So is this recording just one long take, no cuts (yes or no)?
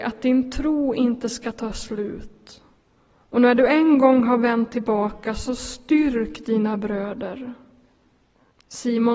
yes